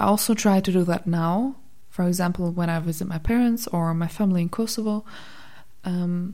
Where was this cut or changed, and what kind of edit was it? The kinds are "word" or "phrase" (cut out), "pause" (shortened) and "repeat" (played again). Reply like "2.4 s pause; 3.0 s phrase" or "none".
none

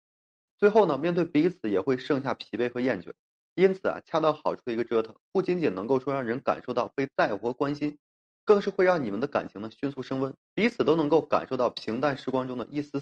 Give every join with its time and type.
3.3 s pause; 10.4 s pause

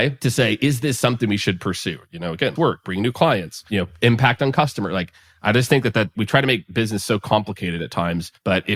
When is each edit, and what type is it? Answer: 2.6 s word

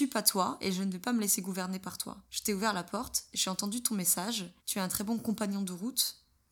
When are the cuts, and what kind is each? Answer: 2.3 s pause; 4.6 s pause

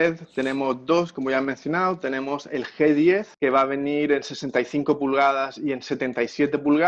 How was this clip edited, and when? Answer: 3.3 s pause

